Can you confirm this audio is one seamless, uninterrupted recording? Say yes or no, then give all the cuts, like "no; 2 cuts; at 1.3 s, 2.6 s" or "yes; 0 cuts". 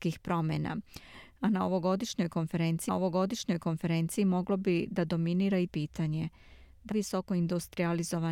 no; 3 cuts; at 2.9 s, 5.7 s, 6.9 s